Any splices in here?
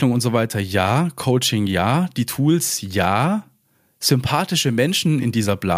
no; 0 cuts

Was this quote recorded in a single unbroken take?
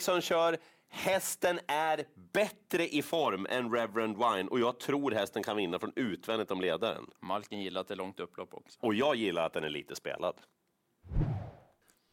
no; 1 cut; at 7.2 s

